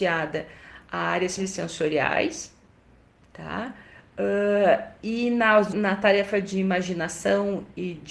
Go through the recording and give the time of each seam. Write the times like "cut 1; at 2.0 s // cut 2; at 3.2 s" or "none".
cut 1; at 1.4 s // cut 2; at 5.7 s